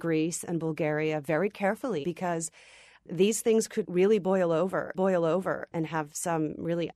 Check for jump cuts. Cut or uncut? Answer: cut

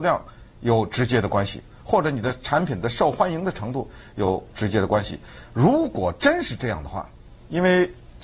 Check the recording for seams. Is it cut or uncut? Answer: uncut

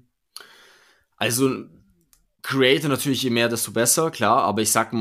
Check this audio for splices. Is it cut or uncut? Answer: uncut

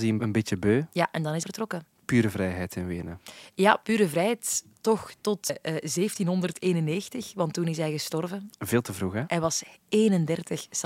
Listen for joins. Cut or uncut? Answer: cut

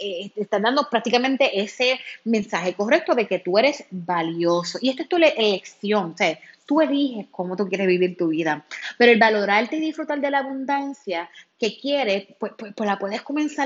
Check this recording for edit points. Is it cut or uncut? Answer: uncut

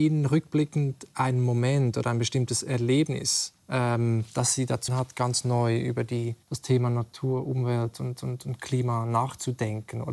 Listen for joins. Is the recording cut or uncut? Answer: cut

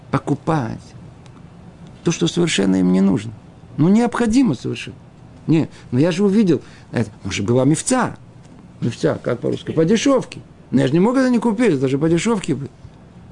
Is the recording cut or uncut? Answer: uncut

